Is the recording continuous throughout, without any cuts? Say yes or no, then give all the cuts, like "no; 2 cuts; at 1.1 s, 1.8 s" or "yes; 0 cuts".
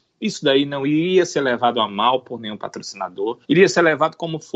no; 1 cut; at 3.4 s